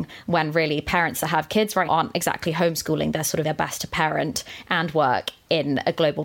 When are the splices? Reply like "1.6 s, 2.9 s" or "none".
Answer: 1.9 s, 3.4 s